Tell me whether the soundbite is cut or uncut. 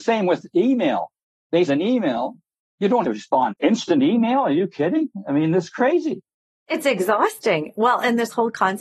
cut